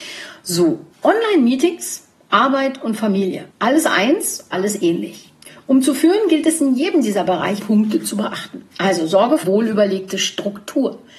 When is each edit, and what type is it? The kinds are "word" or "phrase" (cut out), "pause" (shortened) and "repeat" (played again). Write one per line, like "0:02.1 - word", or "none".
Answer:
0:00.9 - pause
0:03.5 - pause
0:04.5 - word
0:07.6 - word
0:08.7 - pause
0:09.4 - word